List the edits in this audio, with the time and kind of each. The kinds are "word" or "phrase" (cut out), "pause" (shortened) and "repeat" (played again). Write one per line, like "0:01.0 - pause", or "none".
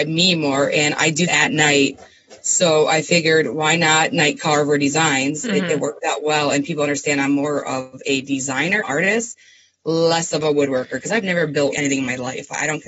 0:01.3 - word
0:08.8 - word
0:11.7 - word